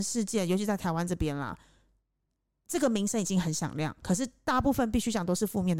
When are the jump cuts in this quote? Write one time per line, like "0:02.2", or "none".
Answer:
none